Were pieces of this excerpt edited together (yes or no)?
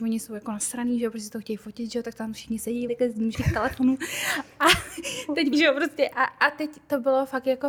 yes